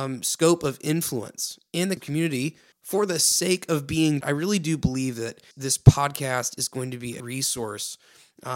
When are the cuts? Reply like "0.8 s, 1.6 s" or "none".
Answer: 2.0 s, 2.7 s, 4.2 s, 5.5 s, 7.2 s